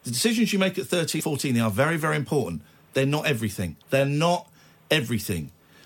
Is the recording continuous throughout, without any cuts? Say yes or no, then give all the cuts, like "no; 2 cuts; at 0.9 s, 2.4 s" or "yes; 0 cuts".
no; 2 cuts; at 1.2 s, 3.8 s